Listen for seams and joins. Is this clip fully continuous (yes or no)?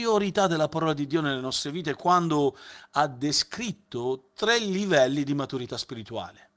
yes